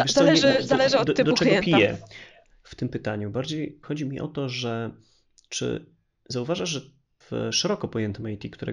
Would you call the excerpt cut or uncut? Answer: cut